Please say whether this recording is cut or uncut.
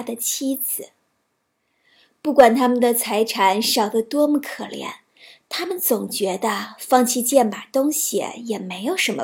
uncut